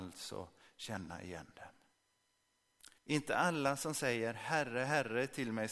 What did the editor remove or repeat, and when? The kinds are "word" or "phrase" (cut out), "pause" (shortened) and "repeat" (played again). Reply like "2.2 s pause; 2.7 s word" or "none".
3.0 s pause